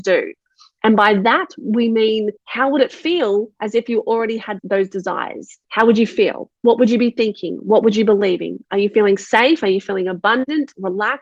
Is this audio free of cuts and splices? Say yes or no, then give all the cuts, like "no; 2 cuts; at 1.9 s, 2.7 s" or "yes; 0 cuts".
no; 4 cuts; at 2.4 s, 4.6 s, 5.6 s, 6.6 s